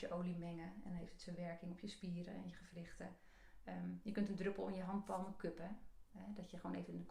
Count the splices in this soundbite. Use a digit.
0